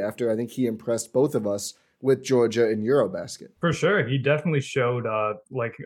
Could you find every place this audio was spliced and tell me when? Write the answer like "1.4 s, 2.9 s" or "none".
3.6 s